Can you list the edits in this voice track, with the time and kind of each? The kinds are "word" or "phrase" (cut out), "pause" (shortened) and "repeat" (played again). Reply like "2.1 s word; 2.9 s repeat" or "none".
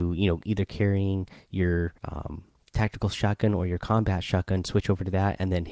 2.0 s pause